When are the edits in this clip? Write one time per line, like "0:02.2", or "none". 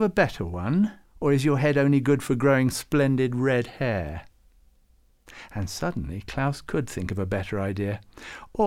0:01.0

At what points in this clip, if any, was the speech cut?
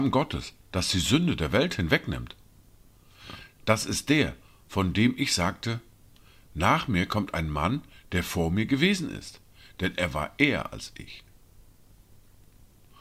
none

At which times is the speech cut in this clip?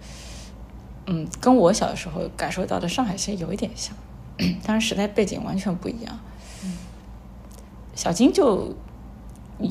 none

